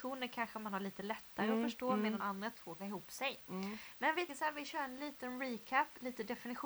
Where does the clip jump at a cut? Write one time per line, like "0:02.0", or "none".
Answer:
0:02.2
0:02.8
0:04.3